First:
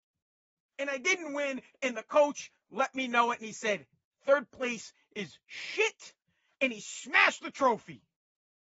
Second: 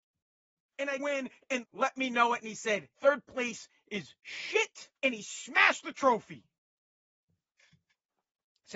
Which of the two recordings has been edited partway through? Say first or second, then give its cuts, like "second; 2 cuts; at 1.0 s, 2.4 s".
second; 4 cuts; at 1.0 s, 1.6 s, 2.9 s, 5.0 s